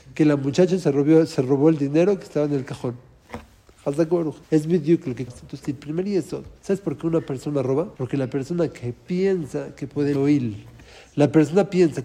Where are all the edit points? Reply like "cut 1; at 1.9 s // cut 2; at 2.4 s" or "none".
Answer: cut 1; at 4.4 s // cut 2; at 5.3 s // cut 3; at 5.6 s // cut 4; at 6.6 s // cut 5; at 7.9 s // cut 6; at 10.1 s